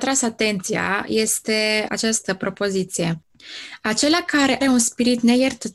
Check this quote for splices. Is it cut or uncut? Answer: cut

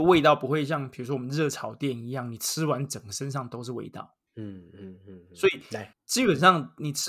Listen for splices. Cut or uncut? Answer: cut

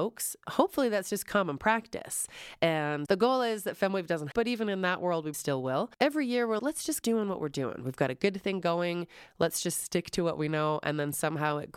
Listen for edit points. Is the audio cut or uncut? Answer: cut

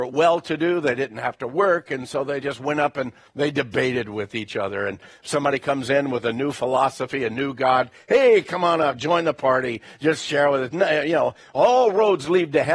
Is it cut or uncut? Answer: uncut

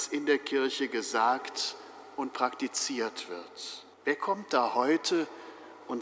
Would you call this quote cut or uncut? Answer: cut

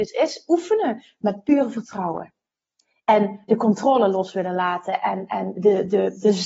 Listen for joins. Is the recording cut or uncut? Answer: uncut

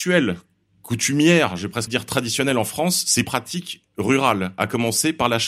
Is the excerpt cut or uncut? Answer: cut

